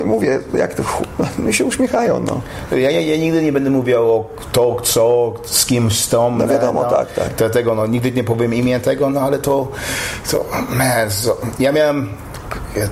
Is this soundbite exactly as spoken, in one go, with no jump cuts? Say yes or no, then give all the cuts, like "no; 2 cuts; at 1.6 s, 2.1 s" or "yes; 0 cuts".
yes; 0 cuts